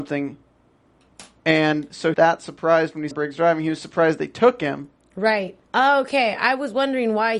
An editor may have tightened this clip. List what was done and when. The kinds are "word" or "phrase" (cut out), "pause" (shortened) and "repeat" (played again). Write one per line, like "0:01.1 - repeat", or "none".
0:02.1 - phrase
0:03.1 - word
0:05.6 - pause